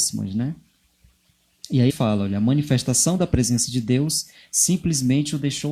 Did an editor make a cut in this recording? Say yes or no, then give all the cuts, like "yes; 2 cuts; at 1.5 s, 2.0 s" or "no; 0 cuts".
yes; 1 cut; at 1.9 s